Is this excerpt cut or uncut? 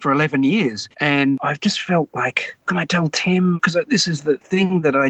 cut